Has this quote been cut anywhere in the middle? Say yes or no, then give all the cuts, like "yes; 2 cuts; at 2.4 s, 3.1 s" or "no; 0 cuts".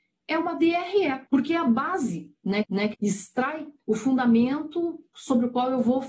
yes; 4 cuts; at 1.3 s, 2.6 s, 2.9 s, 3.8 s